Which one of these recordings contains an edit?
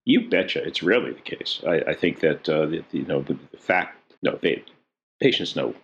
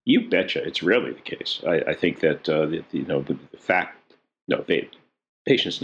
first; 1 cut; at 4.2 s

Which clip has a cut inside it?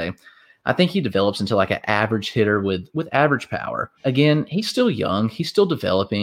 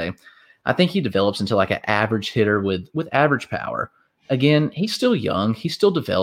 first; 1 cut; at 3.9 s

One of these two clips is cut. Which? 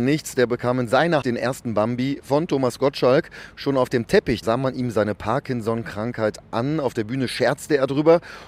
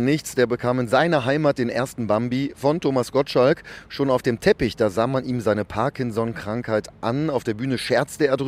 first; 2 cuts; at 1.2 s, 4.4 s

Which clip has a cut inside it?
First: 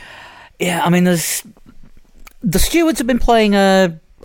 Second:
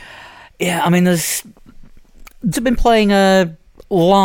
second; 1 cut; at 2.5 s

